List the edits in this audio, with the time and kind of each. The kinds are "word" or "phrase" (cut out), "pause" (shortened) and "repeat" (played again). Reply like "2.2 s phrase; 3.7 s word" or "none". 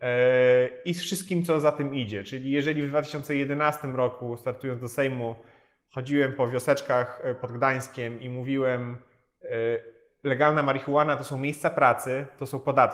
none